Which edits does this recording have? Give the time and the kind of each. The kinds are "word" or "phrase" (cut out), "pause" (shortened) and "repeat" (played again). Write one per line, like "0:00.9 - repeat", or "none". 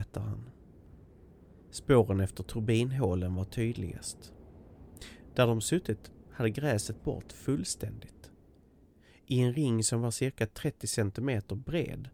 0:07.0 - word